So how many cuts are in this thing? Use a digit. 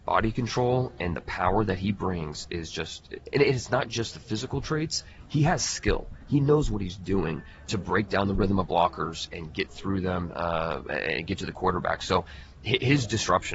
0